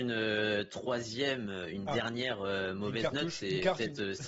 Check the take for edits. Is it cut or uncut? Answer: uncut